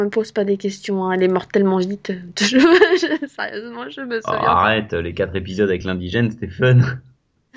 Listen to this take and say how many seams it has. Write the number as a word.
zero